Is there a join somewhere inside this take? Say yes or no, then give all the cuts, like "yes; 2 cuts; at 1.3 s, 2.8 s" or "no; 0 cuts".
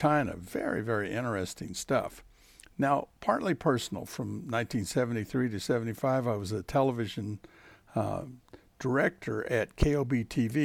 no; 0 cuts